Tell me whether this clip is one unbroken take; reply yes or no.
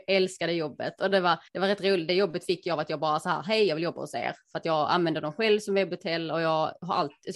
no